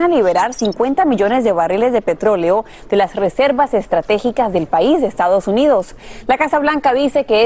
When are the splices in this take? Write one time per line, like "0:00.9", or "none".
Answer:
none